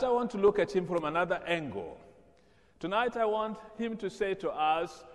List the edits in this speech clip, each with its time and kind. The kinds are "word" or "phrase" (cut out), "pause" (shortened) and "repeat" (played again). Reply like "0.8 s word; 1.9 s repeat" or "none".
none